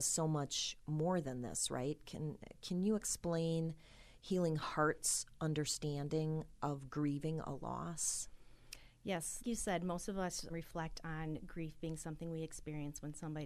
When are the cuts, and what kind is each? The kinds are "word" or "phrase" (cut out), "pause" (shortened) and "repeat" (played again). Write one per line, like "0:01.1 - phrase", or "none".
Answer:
0:09.4 - word
0:10.5 - word